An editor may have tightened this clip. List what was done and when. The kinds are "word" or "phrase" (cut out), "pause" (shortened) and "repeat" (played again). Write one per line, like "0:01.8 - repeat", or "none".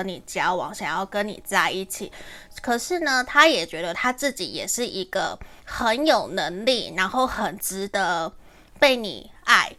0:05.6 - pause